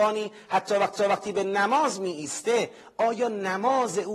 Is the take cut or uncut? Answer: cut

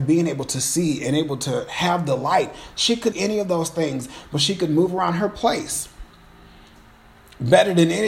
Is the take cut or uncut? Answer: cut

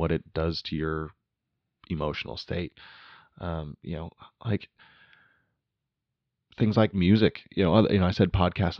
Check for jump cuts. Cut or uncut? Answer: uncut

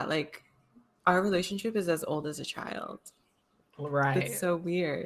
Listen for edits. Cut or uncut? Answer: uncut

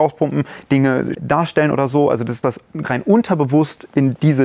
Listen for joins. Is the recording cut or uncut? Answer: cut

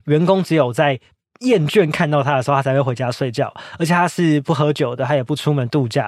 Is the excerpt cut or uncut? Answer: uncut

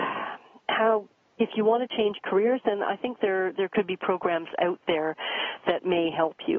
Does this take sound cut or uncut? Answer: cut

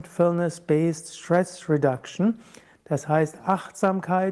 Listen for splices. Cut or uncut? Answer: uncut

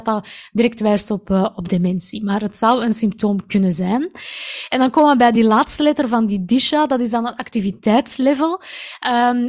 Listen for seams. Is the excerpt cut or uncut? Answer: uncut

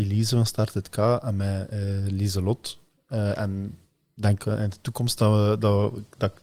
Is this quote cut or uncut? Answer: uncut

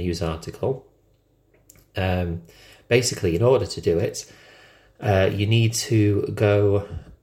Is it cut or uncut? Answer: uncut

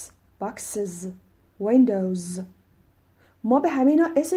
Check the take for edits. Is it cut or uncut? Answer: cut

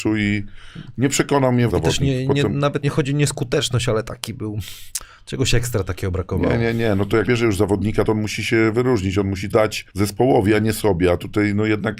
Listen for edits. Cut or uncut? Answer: cut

